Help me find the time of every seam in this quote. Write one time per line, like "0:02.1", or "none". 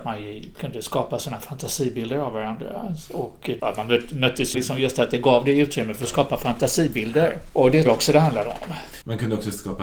0:04.5
0:07.9